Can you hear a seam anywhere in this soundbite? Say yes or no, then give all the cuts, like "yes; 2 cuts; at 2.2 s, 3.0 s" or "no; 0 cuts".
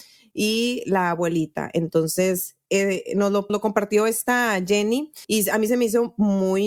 yes; 2 cuts; at 3.5 s, 5.2 s